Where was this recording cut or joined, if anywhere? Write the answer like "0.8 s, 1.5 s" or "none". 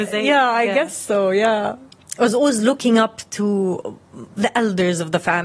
none